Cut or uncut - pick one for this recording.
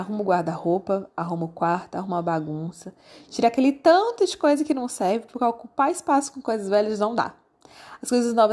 uncut